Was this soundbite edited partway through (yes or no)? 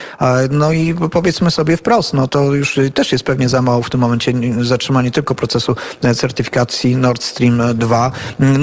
yes